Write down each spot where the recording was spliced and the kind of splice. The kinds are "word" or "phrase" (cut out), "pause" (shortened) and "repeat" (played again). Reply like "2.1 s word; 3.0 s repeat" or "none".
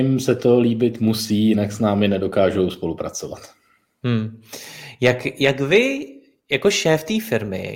none